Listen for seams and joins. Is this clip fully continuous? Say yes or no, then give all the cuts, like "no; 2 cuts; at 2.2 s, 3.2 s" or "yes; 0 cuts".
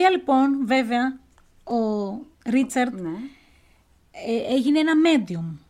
no; 1 cut; at 2.3 s